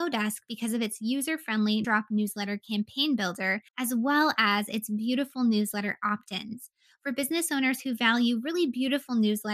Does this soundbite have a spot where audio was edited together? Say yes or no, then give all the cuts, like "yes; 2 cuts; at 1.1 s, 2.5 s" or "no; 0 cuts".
yes; 2 cuts; at 1.8 s, 3.7 s